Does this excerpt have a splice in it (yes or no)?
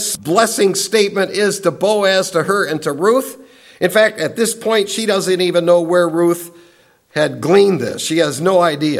no